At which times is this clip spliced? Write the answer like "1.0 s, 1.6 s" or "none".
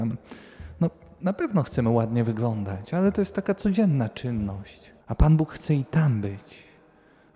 5.0 s